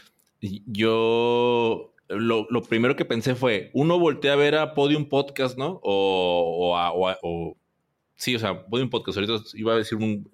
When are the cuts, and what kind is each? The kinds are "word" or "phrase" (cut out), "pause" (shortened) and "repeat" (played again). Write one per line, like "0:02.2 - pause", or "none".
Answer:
0:07.2 - word